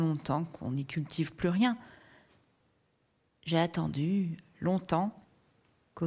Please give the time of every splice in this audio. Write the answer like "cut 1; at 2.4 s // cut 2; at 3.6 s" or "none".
none